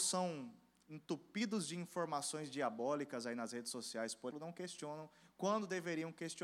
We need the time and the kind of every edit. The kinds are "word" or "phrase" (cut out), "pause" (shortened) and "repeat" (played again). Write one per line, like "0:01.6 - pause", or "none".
0:04.3 - word